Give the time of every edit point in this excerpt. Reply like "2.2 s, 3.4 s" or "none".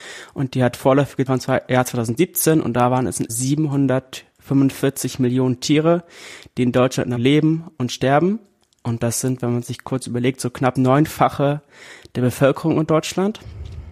1.3 s, 3.3 s, 7.2 s, 10.8 s

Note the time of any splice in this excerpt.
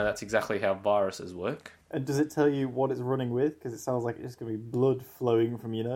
1.8 s

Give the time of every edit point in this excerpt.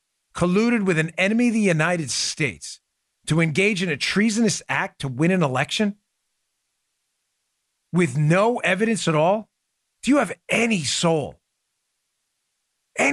none

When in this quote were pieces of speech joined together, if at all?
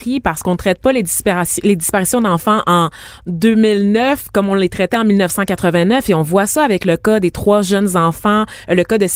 none

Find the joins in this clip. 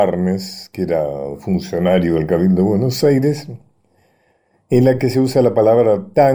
none

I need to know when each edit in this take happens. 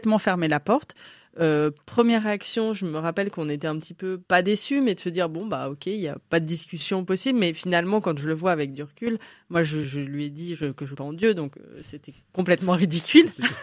4.2 s, 9.8 s, 11.0 s

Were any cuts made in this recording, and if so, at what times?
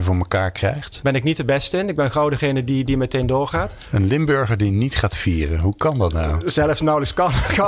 none

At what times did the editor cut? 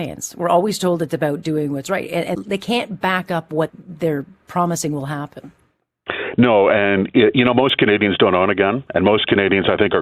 2.3 s, 3.7 s

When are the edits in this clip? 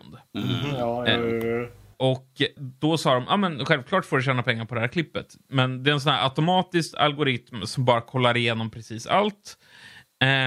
1.9 s, 2.6 s

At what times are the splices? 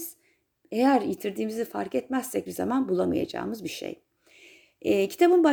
2.5 s

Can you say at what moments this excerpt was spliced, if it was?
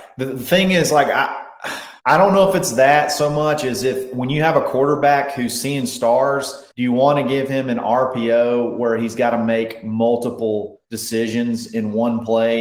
2.0 s, 6.7 s, 10.8 s

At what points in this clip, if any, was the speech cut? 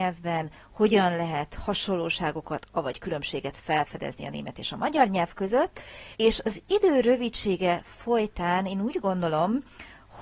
6.1 s

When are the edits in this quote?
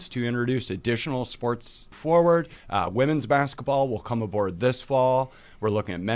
1.9 s, 2.6 s

